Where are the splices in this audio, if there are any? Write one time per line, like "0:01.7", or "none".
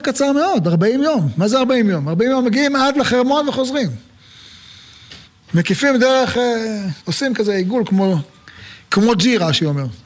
0:05.3
0:07.0